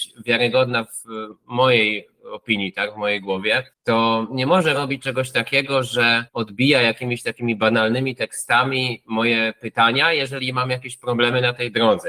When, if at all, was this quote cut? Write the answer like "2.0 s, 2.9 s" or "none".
3.7 s, 6.3 s